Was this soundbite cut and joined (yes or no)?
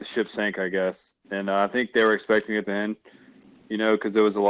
yes